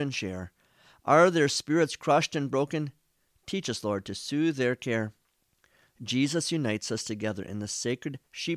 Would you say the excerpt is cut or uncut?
cut